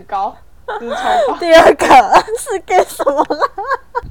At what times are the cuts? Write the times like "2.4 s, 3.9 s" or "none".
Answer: none